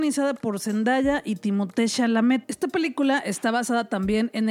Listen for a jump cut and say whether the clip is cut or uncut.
uncut